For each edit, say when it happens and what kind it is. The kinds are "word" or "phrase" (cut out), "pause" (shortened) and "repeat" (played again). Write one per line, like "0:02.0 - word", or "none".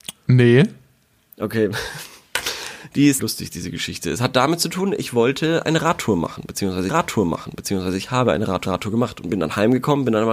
0:03.2 - phrase
0:06.9 - repeat
0:08.6 - repeat